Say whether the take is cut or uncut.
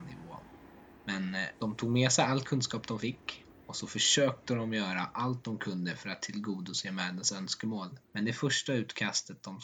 cut